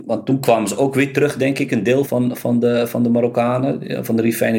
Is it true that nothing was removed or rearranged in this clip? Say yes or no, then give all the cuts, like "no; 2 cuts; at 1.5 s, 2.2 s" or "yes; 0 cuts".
no; 1 cut; at 2.1 s